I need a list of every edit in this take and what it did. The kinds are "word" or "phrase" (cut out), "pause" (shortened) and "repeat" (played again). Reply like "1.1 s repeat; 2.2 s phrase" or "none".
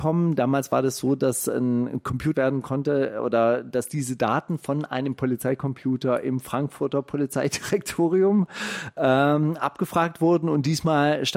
2.3 s word

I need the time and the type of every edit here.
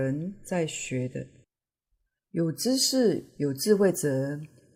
1.5 s pause; 3.3 s pause

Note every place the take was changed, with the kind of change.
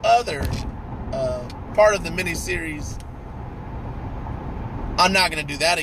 none

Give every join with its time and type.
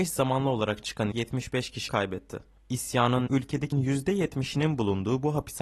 1.1 s word; 1.9 s word; 3.3 s word; 3.7 s word

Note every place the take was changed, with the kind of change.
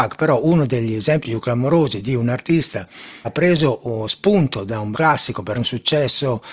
1.2 s word; 3.2 s word; 4.9 s word; 5.5 s word

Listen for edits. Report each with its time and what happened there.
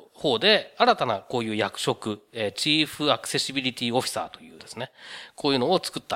4.6 s word

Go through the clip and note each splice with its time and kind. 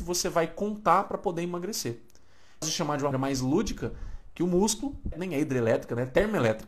2.6 s word; 3.1 s word; 5.1 s phrase

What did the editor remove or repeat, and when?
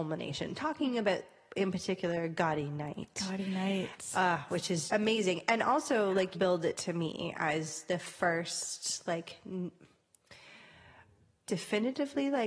4.9 s word; 6.3 s word; 11.5 s word

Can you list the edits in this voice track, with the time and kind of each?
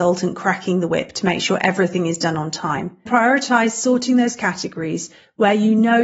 3.1 s word

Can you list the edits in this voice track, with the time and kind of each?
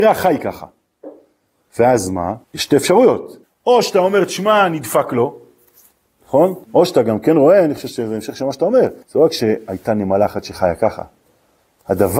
2.4 s pause; 3.4 s pause; 6.6 s pause; 9.0 s pause

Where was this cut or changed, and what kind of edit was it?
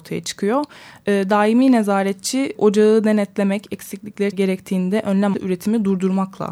2.6 s word; 4.3 s phrase; 5.3 s word

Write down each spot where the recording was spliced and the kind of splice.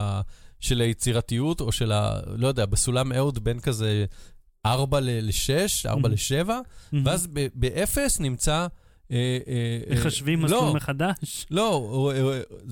none

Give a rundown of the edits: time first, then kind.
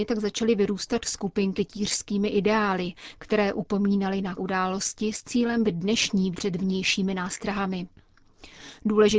1.6 s word; 4.4 s phrase; 5.6 s word; 6.3 s word

